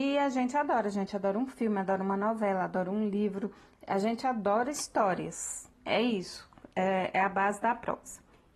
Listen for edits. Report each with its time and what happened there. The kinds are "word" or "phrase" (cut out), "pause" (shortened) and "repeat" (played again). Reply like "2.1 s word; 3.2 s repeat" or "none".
3.7 s pause; 5.7 s pause